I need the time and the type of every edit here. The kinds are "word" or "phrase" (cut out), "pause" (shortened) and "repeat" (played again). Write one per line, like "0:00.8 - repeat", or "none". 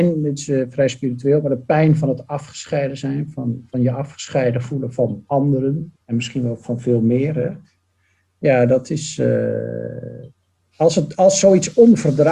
0:06.0 - pause

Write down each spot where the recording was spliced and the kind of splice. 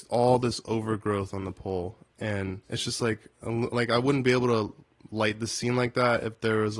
0:02.6 - pause

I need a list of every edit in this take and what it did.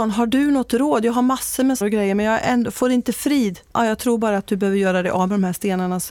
0:01.8 - phrase
0:03.7 - pause

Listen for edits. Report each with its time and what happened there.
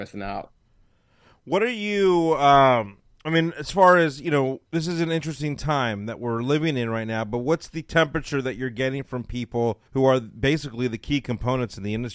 0:04.6 - pause
0:09.9 - pause

